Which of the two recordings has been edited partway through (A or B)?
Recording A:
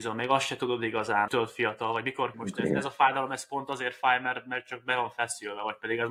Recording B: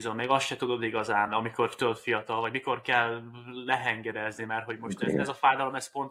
A